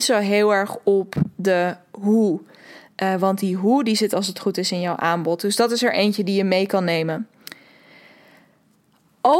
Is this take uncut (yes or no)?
yes